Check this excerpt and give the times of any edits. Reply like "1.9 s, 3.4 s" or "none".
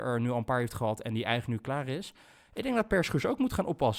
none